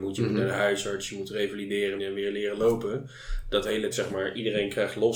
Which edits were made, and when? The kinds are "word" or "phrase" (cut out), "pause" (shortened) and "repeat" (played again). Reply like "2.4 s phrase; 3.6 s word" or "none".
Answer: 2.0 s word; 3.9 s word